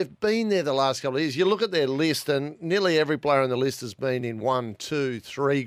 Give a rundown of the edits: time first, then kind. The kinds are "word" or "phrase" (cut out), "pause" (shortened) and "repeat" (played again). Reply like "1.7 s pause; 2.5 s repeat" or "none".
none